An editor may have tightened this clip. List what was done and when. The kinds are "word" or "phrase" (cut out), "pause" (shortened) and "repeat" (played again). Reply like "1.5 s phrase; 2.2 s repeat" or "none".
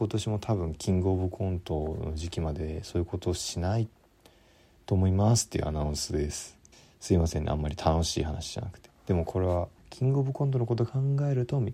6.7 s pause; 9.8 s pause